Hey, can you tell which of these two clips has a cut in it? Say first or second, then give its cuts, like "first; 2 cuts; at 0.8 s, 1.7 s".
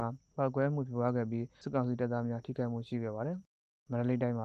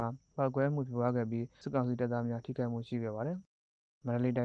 first; 1 cut; at 3.5 s